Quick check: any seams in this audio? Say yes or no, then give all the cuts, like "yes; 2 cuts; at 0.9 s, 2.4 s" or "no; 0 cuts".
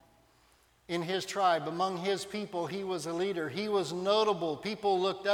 no; 0 cuts